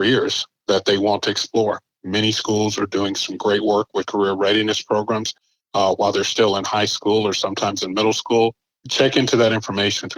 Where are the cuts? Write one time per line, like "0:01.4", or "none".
none